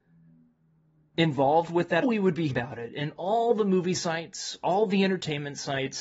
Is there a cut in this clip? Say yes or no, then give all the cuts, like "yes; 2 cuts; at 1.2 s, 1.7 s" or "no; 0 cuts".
yes; 2 cuts; at 2.0 s, 2.5 s